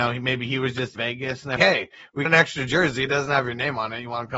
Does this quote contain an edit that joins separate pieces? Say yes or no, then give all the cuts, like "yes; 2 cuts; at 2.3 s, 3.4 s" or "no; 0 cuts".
yes; 3 cuts; at 1.0 s, 1.6 s, 2.3 s